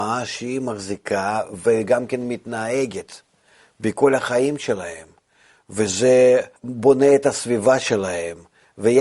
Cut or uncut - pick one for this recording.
cut